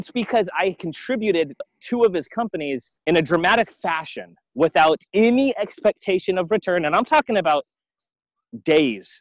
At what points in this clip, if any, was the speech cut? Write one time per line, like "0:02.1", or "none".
0:01.6
0:03.0
0:05.1